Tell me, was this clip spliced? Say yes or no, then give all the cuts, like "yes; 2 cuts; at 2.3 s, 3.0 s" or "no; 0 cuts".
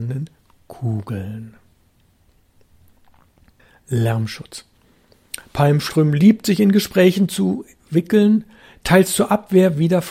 no; 0 cuts